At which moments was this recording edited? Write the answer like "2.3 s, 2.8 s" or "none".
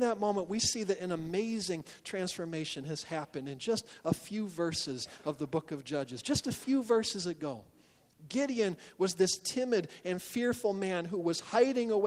none